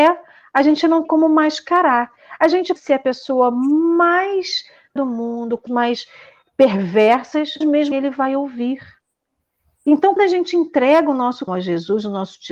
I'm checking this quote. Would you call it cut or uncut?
cut